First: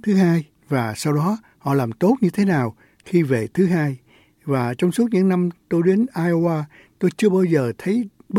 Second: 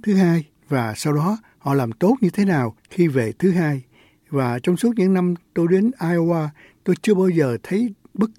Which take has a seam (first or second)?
second